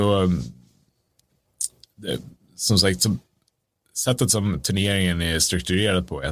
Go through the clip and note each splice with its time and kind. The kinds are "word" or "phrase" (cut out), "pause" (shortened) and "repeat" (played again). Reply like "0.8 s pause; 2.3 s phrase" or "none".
none

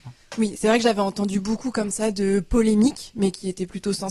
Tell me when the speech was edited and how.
none

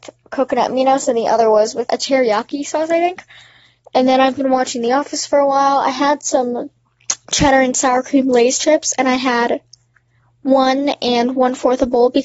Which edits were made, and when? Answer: 1.9 s word

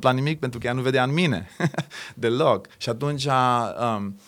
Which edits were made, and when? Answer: 2.7 s pause

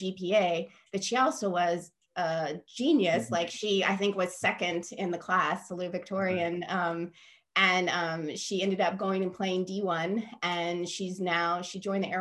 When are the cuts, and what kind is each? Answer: none

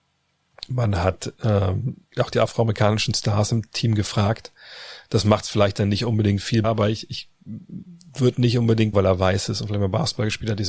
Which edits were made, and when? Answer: 2.1 s pause; 6.6 s word; 8.9 s phrase

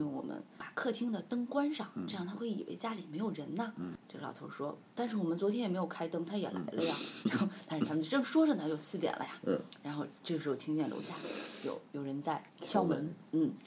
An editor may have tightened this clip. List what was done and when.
10.2 s pause; 12.5 s pause

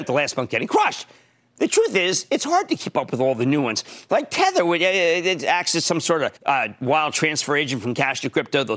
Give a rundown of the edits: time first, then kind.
6.4 s pause

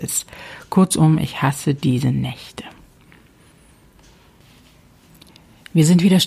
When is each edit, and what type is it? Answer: none

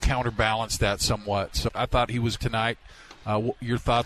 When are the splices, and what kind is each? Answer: 1.7 s word; 2.4 s word

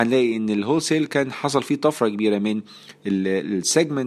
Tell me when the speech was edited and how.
none

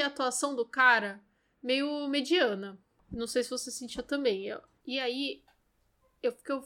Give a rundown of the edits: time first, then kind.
none

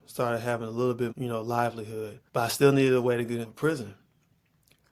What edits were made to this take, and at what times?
1.1 s word; 2.3 s pause; 3.4 s phrase

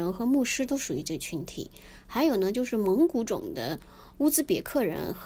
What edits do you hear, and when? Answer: none

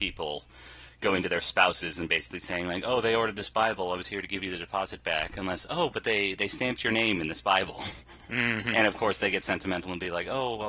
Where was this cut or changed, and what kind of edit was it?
none

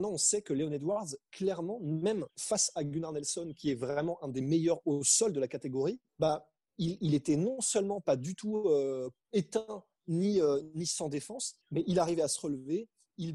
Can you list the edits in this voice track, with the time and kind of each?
2.3 s pause; 6.1 s pause; 11.6 s pause

